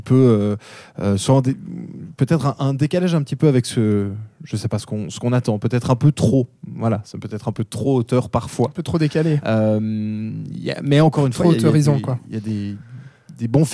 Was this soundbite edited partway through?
no; 0 cuts

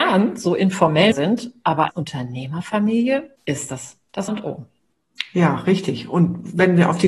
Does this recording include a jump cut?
yes; 4 cuts; at 1.1 s, 1.9 s, 3.4 s, 4.3 s

